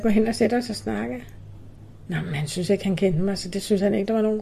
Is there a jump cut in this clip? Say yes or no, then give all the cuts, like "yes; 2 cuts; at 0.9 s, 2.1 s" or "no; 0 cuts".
no; 0 cuts